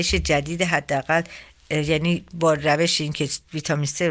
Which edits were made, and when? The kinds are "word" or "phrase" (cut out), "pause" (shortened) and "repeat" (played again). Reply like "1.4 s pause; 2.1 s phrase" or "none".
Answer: none